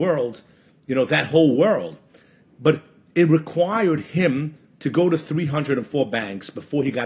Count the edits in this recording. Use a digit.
0